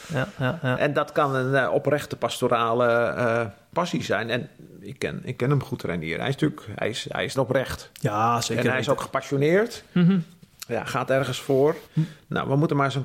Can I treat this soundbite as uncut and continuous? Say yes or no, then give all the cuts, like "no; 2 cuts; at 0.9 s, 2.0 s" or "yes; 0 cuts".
no; 2 cuts; at 7.3 s, 11.8 s